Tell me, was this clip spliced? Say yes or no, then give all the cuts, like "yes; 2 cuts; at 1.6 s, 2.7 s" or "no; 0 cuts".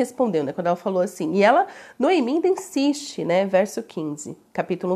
no; 0 cuts